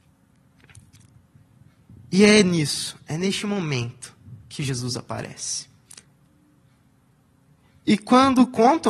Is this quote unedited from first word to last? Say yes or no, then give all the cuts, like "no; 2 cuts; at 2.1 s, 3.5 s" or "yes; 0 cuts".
yes; 0 cuts